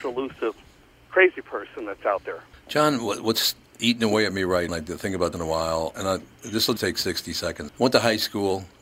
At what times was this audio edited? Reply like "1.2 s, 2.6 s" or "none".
2.5 s, 3.6 s, 4.7 s, 5.3 s, 5.9 s, 6.8 s, 7.7 s

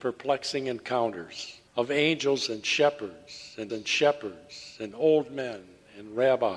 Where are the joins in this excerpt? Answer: 1.7 s, 3.7 s

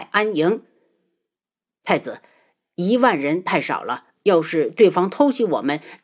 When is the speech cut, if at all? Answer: none

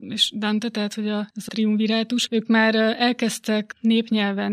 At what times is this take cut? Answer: 1.5 s

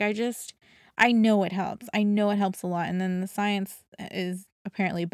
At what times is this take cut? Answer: none

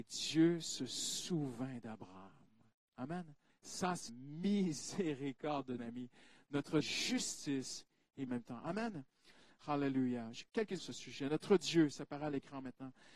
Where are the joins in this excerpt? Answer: 3.5 s, 4.1 s, 5.8 s, 6.8 s, 8.3 s, 10.8 s

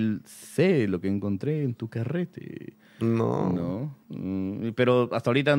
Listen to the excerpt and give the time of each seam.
none

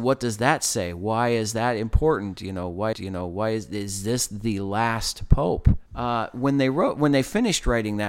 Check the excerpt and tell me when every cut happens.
2.9 s, 5.9 s

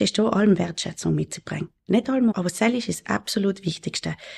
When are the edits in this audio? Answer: 2.3 s

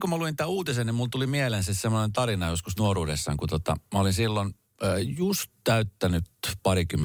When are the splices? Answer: none

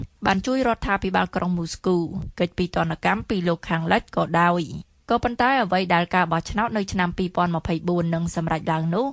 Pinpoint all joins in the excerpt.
none

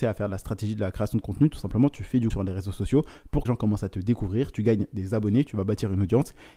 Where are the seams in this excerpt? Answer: 2.3 s, 3.5 s

